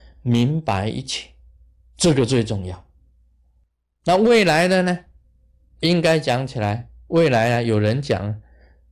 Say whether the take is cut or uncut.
uncut